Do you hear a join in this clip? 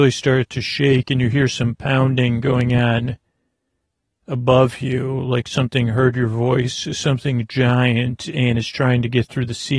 no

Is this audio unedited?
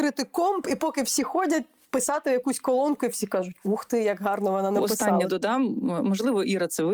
yes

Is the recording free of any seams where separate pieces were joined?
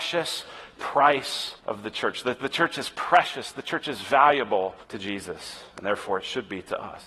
no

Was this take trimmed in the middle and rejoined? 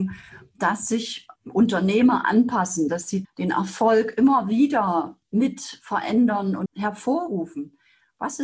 yes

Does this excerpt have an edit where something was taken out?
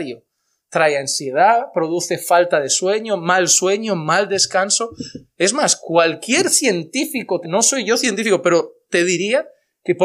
yes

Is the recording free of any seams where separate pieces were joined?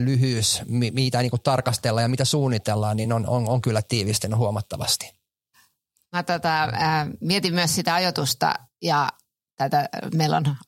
yes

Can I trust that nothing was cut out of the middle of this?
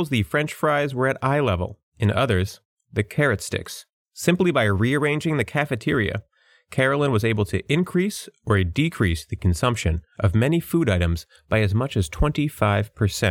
yes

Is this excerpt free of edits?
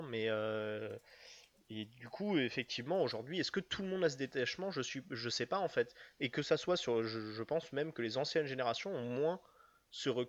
yes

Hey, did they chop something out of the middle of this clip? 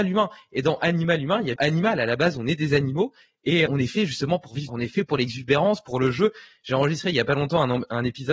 yes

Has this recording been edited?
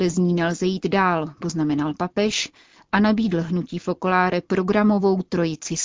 no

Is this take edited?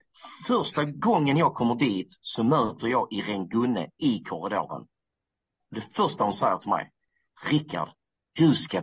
no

